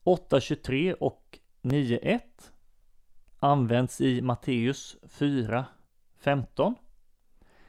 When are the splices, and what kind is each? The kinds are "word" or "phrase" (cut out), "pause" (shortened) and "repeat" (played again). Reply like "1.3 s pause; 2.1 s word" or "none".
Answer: 3.3 s pause